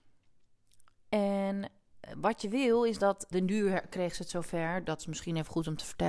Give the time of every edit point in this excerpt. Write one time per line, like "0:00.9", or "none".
0:03.3